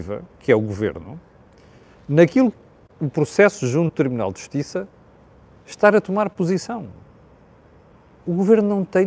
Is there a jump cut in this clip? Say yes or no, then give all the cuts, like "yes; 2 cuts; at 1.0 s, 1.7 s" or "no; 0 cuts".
yes; 1 cut; at 2.5 s